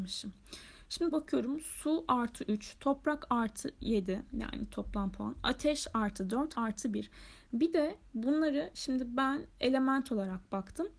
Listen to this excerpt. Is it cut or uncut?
cut